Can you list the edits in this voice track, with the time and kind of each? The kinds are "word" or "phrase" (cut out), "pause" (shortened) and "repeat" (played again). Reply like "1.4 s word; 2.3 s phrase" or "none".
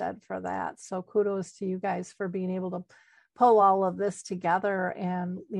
none